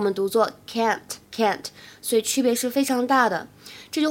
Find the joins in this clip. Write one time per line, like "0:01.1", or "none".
0:01.2